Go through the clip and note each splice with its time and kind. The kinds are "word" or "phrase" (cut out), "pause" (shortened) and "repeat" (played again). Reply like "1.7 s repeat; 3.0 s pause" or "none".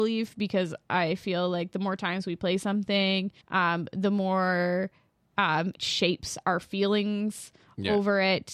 3.4 s pause; 5.7 s word